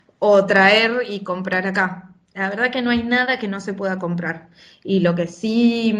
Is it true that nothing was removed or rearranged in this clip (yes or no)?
yes